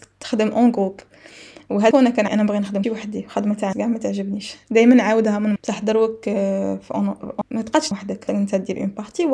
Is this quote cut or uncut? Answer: cut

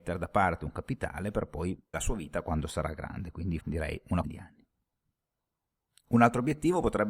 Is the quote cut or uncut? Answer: cut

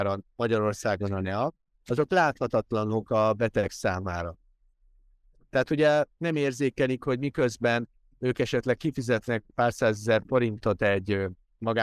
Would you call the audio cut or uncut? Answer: uncut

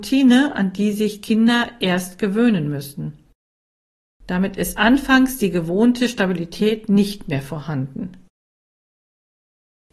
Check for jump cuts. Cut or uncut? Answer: uncut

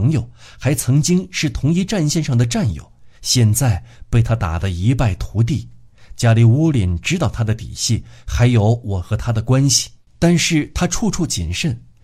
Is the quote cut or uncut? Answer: cut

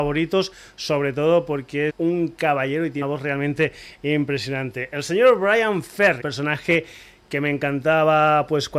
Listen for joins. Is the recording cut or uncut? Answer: cut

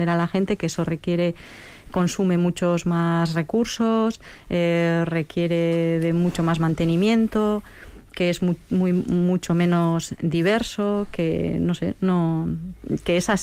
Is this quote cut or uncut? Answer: uncut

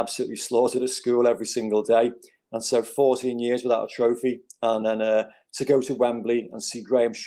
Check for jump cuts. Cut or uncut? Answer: uncut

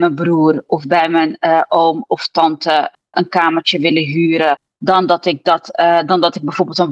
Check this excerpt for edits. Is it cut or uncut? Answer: cut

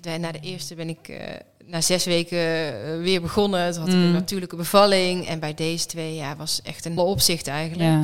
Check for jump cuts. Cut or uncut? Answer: cut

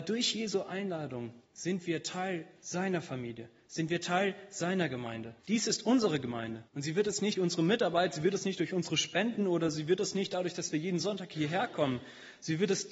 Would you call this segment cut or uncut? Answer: cut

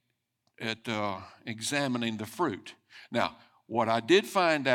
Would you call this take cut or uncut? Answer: uncut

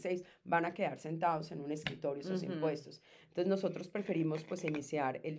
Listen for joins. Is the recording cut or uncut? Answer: uncut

